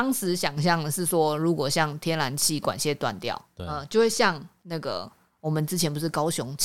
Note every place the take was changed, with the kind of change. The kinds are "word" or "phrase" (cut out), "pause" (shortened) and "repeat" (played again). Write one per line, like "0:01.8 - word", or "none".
none